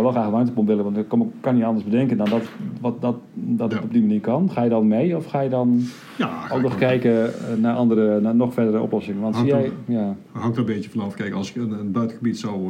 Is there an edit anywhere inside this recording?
no; 0 cuts

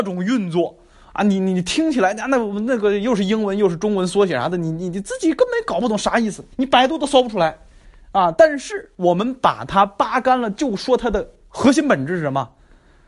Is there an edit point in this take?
yes; 1 cut; at 6.5 s

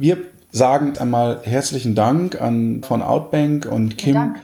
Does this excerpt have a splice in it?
yes; 2 cuts; at 0.9 s, 2.8 s

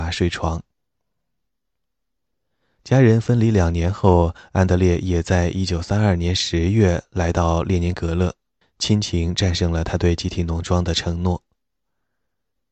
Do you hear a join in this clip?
yes; 1 cut; at 8.6 s

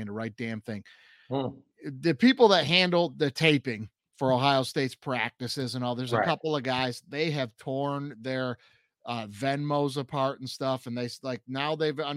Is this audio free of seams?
yes; 0 cuts

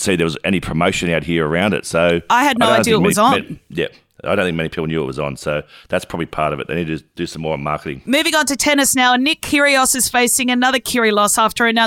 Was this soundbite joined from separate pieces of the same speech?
no; 0 cuts

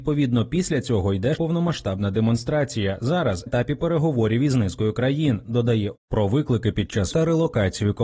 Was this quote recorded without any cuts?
no; 4 cuts; at 1.4 s, 3.5 s, 6.0 s, 7.1 s

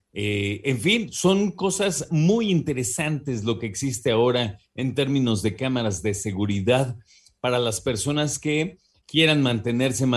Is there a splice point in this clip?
no; 0 cuts

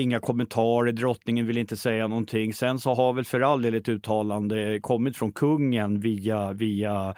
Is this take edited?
no; 0 cuts

